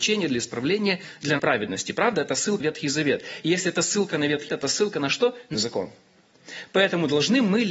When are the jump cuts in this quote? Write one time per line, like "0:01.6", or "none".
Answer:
0:01.4
0:02.6
0:04.5
0:05.5